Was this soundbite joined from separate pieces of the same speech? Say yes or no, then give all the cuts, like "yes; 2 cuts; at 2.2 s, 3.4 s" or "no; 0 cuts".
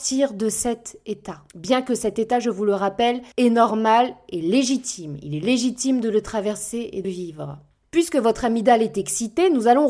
yes; 3 cuts; at 1.5 s, 3.3 s, 7.0 s